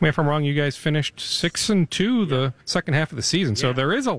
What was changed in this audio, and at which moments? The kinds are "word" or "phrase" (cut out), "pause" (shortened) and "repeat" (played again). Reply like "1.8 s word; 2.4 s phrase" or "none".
2.6 s pause